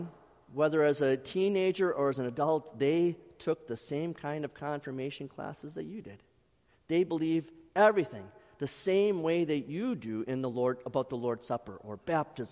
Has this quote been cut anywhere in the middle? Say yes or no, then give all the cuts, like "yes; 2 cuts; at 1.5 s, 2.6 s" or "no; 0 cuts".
no; 0 cuts